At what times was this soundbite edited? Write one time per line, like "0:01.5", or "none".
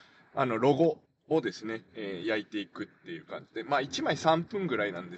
0:01.0
0:01.9